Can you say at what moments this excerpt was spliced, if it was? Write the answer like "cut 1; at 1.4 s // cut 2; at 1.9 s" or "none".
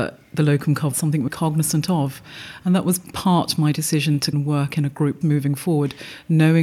cut 1; at 0.9 s // cut 2; at 1.3 s // cut 3; at 4.3 s // cut 4; at 5.2 s